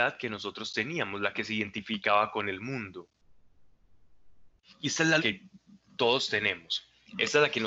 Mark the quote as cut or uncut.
cut